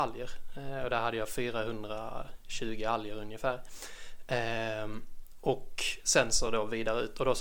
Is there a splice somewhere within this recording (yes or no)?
no